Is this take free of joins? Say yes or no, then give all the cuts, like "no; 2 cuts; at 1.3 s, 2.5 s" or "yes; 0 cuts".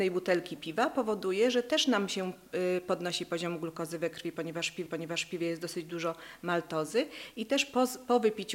no; 1 cut; at 4.9 s